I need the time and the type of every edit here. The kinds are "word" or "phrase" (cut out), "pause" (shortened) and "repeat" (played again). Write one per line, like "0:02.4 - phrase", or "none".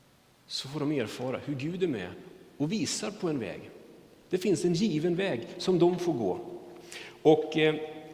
none